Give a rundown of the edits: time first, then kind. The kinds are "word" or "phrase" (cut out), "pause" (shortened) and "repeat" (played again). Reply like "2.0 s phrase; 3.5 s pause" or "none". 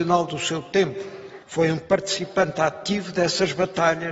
1.4 s pause